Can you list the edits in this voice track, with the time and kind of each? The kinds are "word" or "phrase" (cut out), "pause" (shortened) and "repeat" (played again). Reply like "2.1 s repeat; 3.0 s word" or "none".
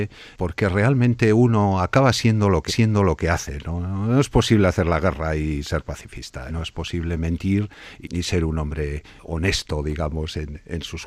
2.7 s repeat; 6.5 s word; 8.0 s word; 9.2 s pause